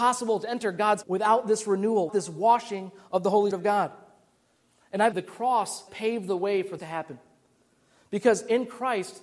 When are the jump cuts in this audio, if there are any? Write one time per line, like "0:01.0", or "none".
0:01.0
0:02.1
0:03.5
0:05.1
0:05.9
0:06.8